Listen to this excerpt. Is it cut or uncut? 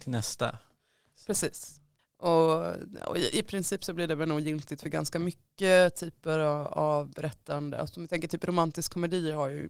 uncut